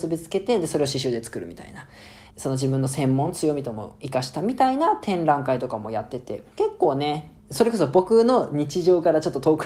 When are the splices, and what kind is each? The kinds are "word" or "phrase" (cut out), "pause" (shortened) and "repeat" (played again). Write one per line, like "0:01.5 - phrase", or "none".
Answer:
0:02.3 - pause